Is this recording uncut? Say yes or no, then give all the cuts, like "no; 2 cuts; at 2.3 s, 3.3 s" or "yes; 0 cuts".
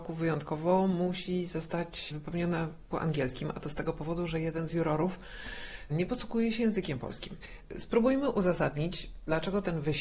no; 1 cut; at 2.9 s